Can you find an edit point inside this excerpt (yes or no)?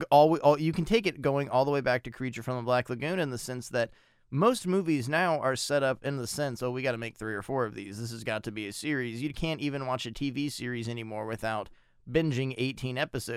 no